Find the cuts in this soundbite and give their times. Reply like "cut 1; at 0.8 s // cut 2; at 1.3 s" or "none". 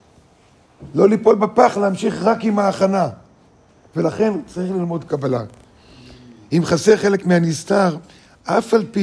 none

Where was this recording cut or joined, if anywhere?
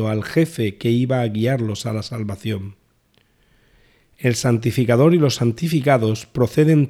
none

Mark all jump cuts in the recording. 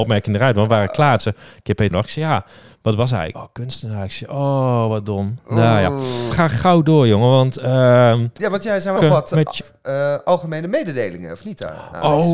cut 1; at 1.2 s // cut 2; at 1.9 s // cut 3; at 3.3 s // cut 4; at 6.3 s // cut 5; at 8.4 s // cut 6; at 9.0 s // cut 7; at 9.6 s

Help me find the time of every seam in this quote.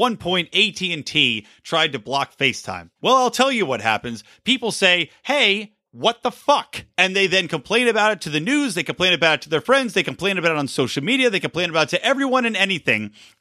cut 1; at 3.0 s // cut 2; at 5.9 s // cut 3; at 6.9 s

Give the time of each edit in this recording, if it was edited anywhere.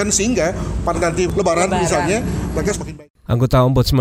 cut 1; at 0.9 s // cut 2; at 1.3 s // cut 3; at 2.7 s

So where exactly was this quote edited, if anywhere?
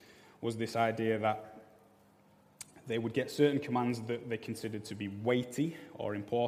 none

